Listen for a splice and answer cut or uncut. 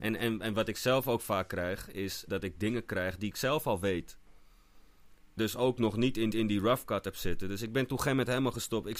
cut